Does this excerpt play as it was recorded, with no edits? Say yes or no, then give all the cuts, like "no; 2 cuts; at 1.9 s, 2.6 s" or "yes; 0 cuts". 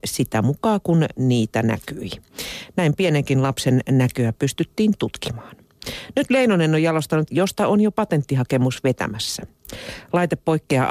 no; 1 cut; at 7.3 s